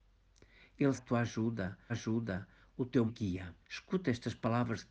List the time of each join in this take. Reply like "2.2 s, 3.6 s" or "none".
1.0 s, 1.9 s, 3.1 s, 3.6 s